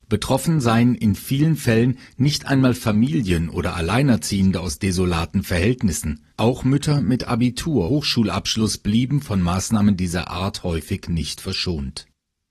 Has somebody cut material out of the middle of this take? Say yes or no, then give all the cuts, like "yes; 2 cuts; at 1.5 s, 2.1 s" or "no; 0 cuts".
yes; 2 cuts; at 6.3 s, 7.9 s